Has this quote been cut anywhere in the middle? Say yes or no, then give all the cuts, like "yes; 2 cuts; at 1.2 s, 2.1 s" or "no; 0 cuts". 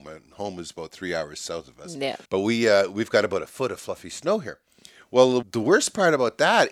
yes; 2 cuts; at 2.3 s, 5.4 s